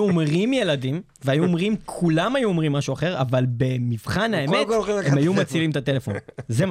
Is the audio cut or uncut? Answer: uncut